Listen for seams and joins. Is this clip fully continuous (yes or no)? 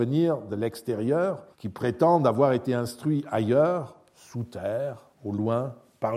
no